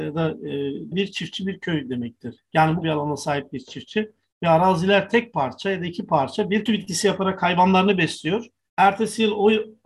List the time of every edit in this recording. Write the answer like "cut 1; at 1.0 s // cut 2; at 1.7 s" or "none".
cut 1; at 0.9 s // cut 2; at 2.4 s // cut 3; at 2.8 s // cut 4; at 6.7 s